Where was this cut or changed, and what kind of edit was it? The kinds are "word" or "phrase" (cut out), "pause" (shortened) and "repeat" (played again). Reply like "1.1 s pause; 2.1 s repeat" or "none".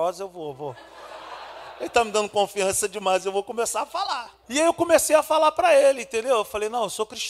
4.4 s pause